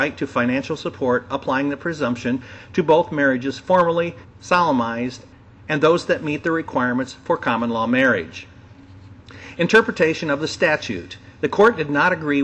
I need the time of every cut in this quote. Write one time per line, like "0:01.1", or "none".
none